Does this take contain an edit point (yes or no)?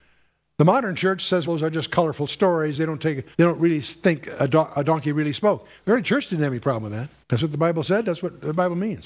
yes